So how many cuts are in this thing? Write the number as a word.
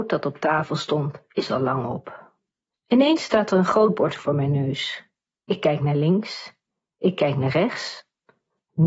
zero